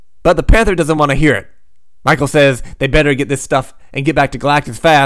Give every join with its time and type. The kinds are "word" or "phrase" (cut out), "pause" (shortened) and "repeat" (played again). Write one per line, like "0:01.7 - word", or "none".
none